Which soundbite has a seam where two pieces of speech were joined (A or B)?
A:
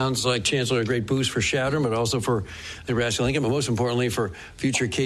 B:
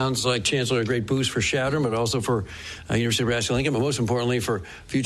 A